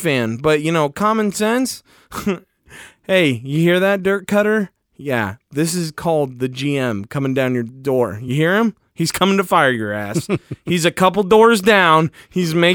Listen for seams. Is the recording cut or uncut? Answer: uncut